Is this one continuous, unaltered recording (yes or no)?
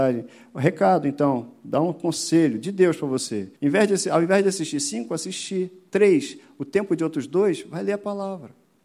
no